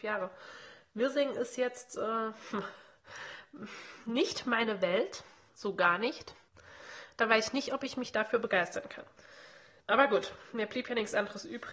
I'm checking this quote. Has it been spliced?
no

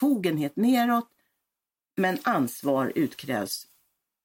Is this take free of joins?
yes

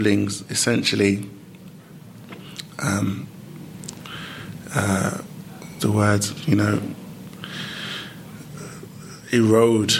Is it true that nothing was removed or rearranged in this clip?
no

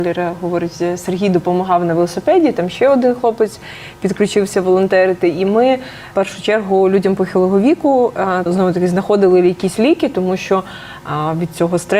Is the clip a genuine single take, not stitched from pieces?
no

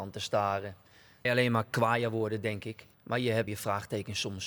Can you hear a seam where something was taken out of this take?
yes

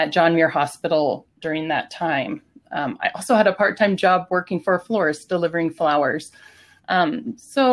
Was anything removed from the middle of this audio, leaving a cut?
no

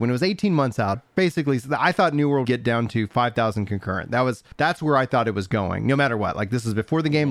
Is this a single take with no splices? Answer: no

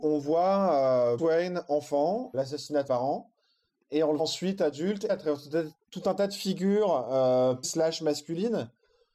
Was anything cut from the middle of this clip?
yes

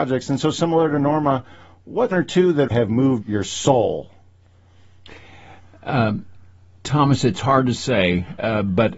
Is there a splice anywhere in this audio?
yes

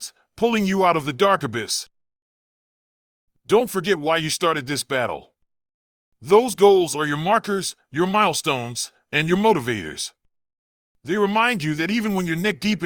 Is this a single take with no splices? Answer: yes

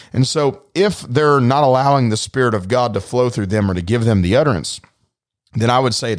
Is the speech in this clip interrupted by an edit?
no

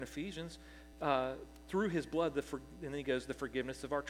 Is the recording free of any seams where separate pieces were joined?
yes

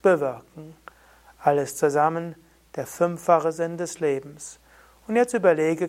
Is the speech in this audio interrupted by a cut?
no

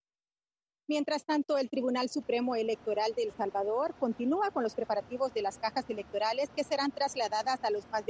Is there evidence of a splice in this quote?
no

